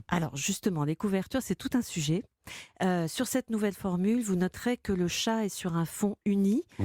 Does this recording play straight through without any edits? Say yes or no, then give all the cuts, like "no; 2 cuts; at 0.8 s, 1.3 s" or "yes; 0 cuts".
yes; 0 cuts